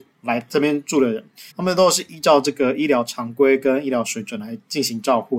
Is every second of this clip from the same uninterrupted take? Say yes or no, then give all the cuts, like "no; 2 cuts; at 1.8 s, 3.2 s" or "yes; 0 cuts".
no; 1 cut; at 1.5 s